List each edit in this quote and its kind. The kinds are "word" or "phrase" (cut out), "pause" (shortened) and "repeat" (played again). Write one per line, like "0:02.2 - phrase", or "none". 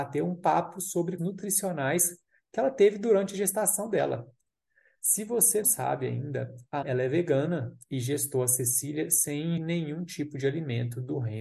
0:01.2 - word
0:05.6 - word
0:06.8 - word
0:09.6 - word